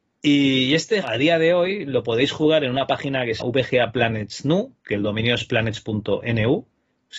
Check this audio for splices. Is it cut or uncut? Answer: cut